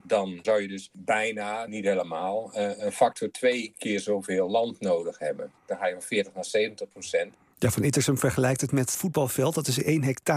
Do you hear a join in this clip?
yes; 2 cuts; at 1.7 s, 8.9 s

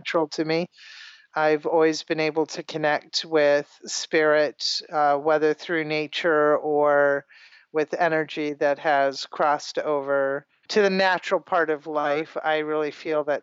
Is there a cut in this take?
no; 0 cuts

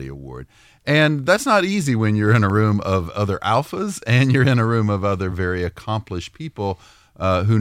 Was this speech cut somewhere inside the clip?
no; 0 cuts

